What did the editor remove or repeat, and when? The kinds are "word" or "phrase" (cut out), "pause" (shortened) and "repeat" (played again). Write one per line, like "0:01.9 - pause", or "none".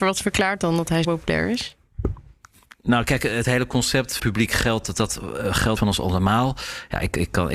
0:01.0 - word
0:03.4 - word
0:04.2 - word
0:05.8 - word